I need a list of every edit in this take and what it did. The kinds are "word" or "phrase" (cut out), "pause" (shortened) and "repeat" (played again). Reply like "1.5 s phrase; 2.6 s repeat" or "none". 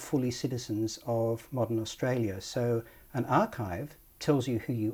none